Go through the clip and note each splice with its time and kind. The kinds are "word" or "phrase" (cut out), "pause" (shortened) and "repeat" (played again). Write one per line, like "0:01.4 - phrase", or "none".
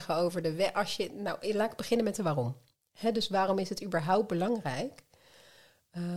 none